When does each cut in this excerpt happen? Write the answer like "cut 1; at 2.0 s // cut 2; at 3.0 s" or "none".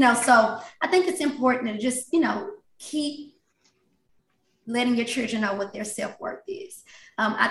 none

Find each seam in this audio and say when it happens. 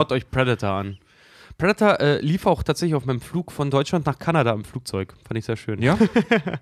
none

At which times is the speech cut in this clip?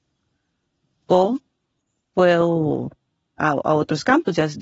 cut 1; at 3.4 s

